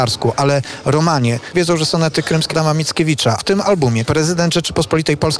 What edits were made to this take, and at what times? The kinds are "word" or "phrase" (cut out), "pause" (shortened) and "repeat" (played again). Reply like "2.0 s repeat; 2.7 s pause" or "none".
1.5 s word; 2.5 s word; 3.4 s word; 4.1 s word

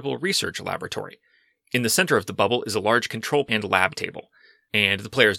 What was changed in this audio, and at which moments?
3.5 s word

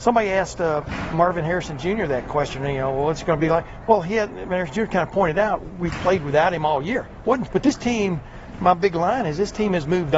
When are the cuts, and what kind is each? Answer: 1.1 s word; 4.5 s word; 7.5 s phrase

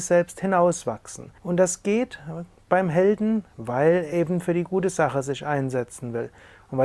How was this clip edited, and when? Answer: 1.4 s pause; 4.1 s word

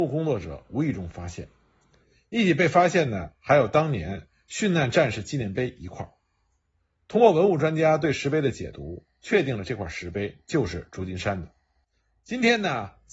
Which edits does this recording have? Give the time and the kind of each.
none

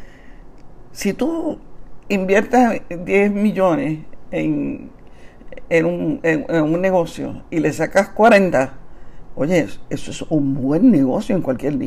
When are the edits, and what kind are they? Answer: none

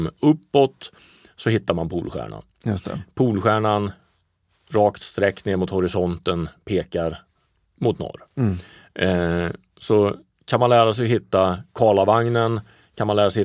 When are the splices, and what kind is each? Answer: none

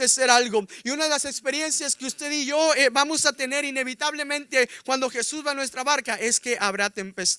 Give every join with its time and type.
none

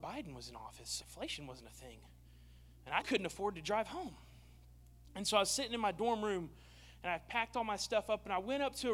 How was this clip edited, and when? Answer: 1.0 s word; 3.0 s word

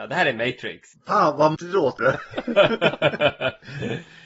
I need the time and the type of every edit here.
1.5 s word; 2.0 s word

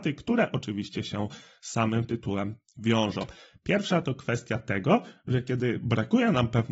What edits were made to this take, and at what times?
none

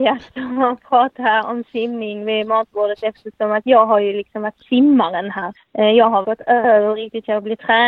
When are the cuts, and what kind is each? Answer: 5.5 s pause; 6.2 s phrase

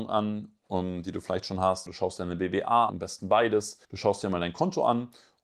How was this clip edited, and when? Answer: 1.9 s word; 2.9 s word; 3.8 s pause

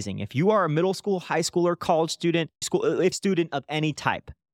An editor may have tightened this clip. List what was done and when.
2.6 s word; 3.1 s phrase

